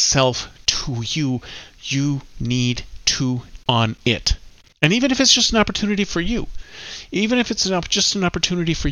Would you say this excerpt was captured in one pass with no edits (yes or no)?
no